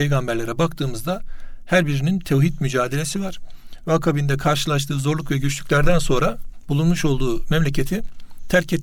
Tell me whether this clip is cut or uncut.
uncut